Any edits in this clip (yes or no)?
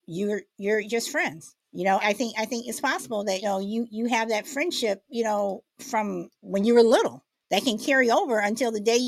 yes